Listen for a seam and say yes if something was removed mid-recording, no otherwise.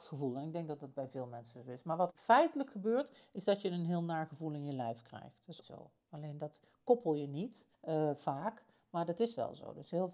yes